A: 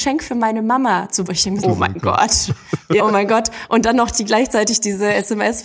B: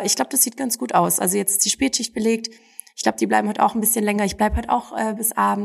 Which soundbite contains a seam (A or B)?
A